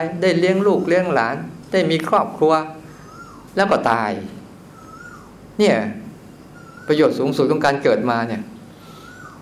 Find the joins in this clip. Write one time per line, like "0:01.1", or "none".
0:03.5